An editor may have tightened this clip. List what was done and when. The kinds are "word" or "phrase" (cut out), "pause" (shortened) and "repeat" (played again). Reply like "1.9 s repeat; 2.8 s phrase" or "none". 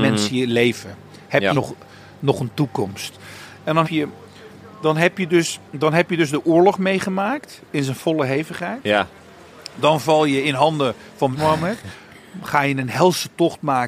1.5 s word; 3.8 s word; 5.7 s pause; 11.3 s word